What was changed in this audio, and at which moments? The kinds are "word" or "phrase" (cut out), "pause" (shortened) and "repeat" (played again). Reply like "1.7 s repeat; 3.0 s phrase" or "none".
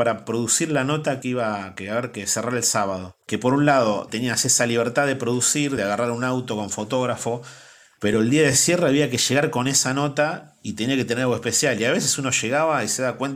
none